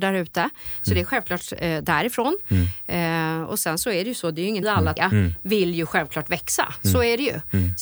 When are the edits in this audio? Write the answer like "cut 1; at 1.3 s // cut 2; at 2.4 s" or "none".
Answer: cut 1; at 4.6 s // cut 2; at 5.0 s